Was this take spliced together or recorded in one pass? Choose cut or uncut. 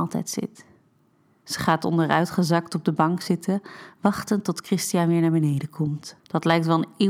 cut